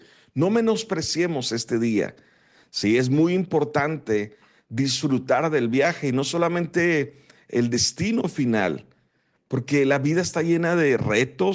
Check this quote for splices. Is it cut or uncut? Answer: uncut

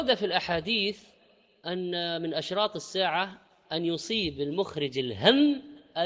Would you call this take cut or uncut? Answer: uncut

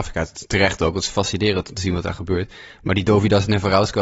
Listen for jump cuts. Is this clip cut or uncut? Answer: uncut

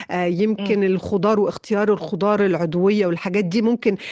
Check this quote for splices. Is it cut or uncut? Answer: uncut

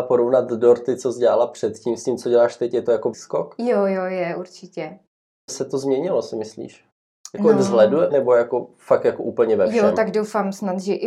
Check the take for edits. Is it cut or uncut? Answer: cut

